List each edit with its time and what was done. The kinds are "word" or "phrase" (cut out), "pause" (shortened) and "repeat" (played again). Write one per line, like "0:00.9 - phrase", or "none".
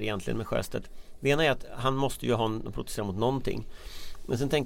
none